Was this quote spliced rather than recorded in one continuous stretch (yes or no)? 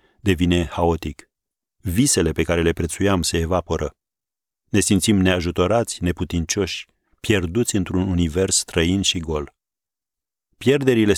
no